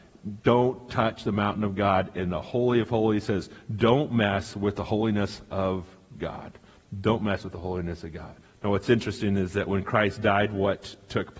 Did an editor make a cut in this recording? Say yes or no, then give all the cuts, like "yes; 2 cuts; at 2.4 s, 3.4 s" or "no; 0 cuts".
yes; 1 cut; at 8.4 s